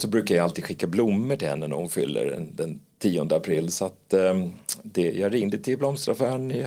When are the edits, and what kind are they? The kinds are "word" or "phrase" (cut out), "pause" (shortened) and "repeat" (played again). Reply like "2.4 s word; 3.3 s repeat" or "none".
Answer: none